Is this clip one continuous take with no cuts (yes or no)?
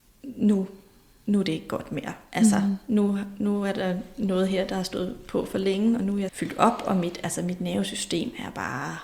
no